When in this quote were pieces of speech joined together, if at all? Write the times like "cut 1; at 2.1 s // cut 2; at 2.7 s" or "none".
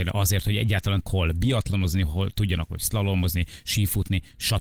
cut 1; at 1.0 s